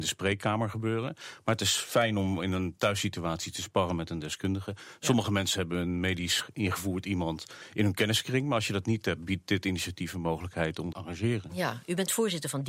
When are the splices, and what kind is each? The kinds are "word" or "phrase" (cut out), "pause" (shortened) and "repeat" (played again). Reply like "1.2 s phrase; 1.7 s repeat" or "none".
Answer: 10.9 s phrase